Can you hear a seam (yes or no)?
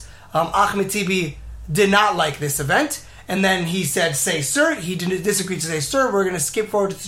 no